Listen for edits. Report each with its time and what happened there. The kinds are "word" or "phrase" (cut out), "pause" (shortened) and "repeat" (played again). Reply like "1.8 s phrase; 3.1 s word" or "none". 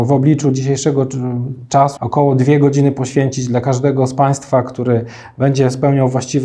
2.0 s word